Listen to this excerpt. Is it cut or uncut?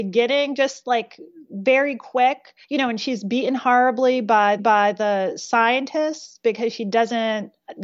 cut